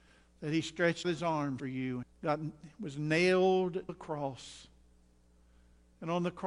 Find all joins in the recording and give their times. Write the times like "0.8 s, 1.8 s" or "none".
1.0 s, 1.6 s, 2.0 s, 3.9 s